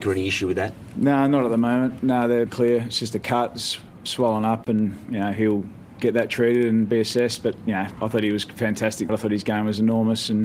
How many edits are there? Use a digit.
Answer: 2